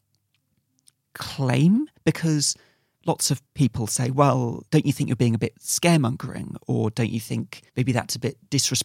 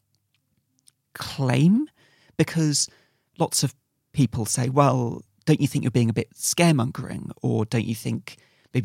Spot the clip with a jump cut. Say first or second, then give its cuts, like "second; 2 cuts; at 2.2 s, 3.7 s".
first; 4 cuts; at 2.0 s, 3.5 s, 4.7 s, 7.7 s